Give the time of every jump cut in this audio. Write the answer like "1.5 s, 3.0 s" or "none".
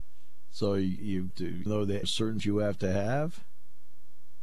1.3 s, 1.7 s, 2.0 s, 2.4 s